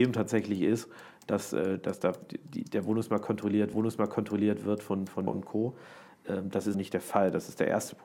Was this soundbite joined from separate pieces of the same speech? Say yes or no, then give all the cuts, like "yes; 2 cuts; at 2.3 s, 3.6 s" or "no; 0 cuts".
yes; 3 cuts; at 3.7 s, 5.3 s, 6.7 s